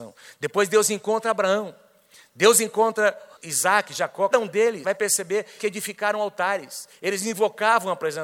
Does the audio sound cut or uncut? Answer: cut